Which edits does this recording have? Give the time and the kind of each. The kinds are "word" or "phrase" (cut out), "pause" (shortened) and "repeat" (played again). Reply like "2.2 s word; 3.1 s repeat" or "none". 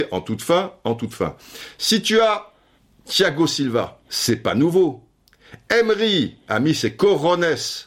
2.8 s pause; 4.0 s pause